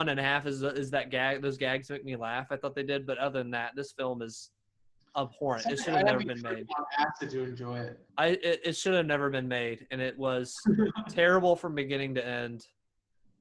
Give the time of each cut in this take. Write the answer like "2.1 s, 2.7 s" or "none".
8.1 s